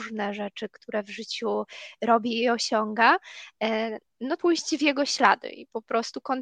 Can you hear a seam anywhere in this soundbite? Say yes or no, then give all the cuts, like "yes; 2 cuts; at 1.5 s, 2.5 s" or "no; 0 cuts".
yes; 1 cut; at 4.4 s